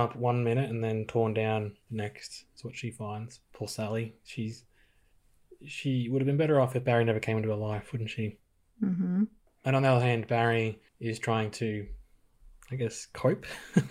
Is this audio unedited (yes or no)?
no